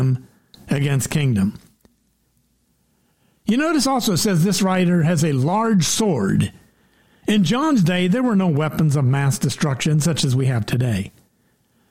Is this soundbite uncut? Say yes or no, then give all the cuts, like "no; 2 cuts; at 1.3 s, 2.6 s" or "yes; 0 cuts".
yes; 0 cuts